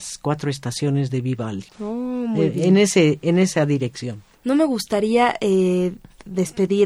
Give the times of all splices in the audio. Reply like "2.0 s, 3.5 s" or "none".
1.7 s